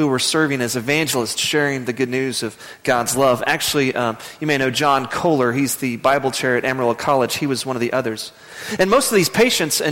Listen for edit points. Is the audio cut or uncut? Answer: uncut